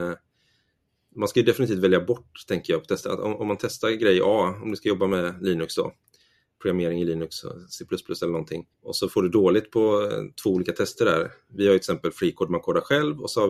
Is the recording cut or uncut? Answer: cut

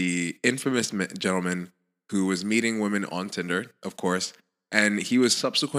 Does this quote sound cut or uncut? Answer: uncut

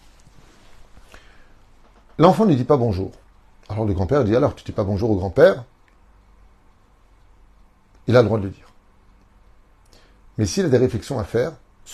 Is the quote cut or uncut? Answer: uncut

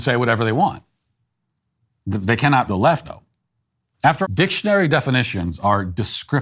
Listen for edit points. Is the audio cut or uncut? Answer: cut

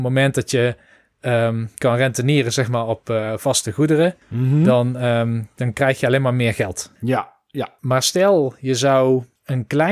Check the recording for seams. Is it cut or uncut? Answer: uncut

